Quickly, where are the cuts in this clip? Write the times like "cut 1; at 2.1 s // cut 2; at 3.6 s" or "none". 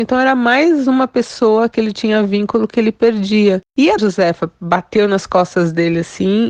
cut 1; at 4.0 s